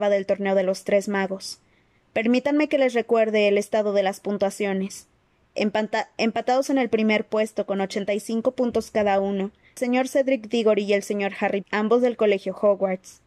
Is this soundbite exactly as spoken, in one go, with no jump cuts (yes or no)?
no